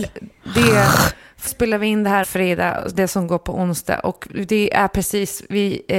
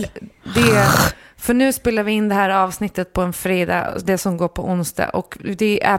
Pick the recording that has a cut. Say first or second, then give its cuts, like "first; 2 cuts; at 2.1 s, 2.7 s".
first; 2 cuts; at 1.5 s, 2.2 s